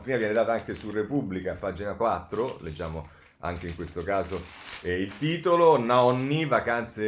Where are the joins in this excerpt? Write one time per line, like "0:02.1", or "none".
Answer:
none